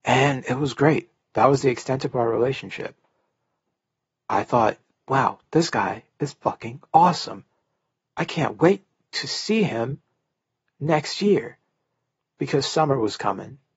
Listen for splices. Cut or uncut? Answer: uncut